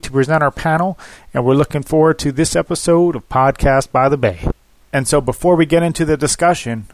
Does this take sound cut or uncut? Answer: uncut